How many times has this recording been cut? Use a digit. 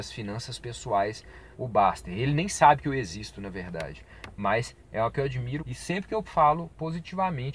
4